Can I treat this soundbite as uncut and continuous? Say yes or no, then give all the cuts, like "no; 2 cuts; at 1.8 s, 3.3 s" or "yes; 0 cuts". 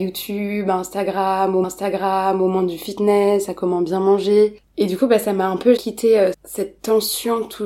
no; 3 cuts; at 1.6 s, 5.8 s, 6.3 s